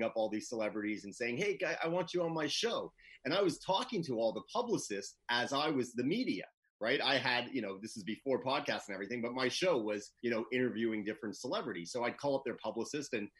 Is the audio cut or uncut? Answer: cut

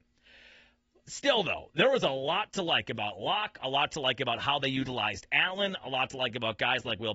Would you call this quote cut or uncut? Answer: uncut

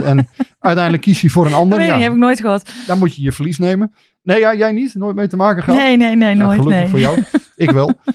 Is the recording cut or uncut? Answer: uncut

